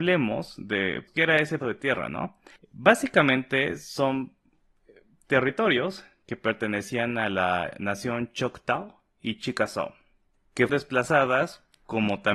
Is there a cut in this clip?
yes; 4 cuts; at 1.1 s, 1.6 s, 2.6 s, 10.7 s

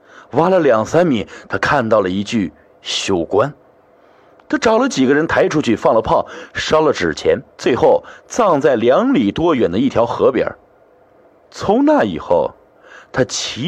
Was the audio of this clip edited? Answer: yes; 1 cut; at 7.5 s

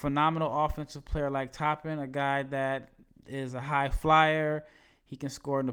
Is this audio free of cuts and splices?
yes; 0 cuts

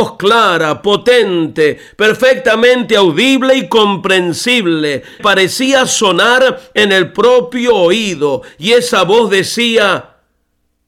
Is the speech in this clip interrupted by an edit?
yes; 1 cut; at 5.2 s

